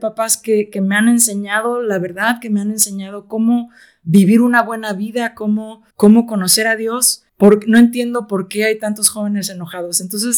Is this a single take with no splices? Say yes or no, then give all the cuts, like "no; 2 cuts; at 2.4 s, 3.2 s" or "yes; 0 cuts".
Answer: no; 2 cuts; at 5.9 s, 7.3 s